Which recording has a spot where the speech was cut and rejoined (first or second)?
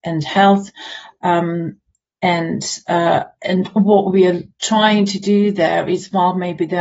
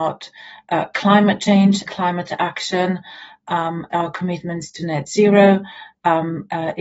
second